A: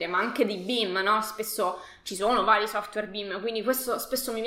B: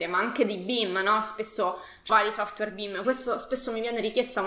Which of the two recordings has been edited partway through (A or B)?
B